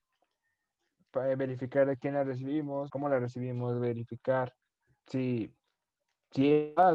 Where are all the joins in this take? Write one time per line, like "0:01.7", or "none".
0:02.9
0:04.9